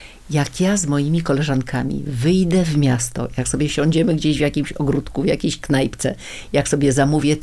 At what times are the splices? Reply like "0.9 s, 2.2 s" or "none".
none